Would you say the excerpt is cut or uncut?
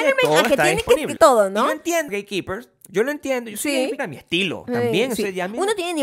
cut